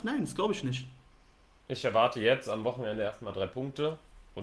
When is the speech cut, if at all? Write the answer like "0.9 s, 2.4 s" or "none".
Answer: none